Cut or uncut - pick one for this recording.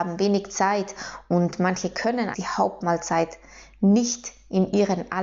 cut